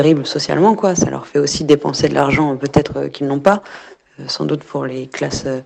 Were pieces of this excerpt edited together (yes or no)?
no